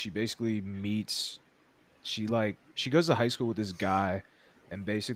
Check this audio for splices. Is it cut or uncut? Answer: uncut